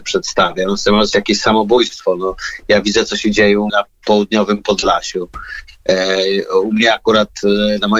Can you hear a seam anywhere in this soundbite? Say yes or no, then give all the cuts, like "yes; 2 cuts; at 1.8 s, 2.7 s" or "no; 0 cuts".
yes; 2 cuts; at 1.1 s, 3.7 s